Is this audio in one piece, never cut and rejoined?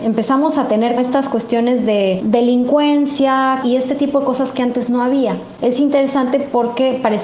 no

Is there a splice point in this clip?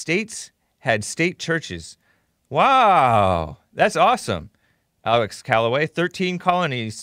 no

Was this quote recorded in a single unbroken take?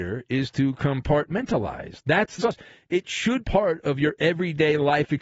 no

